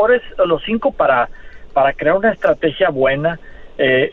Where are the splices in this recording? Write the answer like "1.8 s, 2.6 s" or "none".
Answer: 0.9 s